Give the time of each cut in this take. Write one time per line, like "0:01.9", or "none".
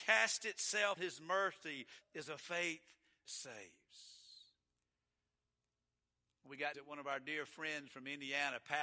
0:01.0
0:02.0
0:03.3
0:06.7